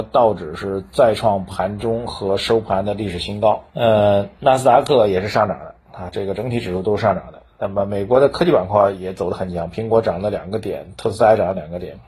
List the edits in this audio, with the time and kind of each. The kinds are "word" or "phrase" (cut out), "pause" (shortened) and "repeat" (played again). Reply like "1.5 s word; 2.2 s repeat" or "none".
3.7 s pause